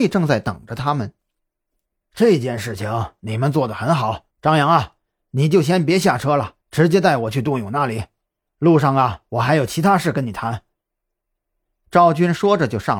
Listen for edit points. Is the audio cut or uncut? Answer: cut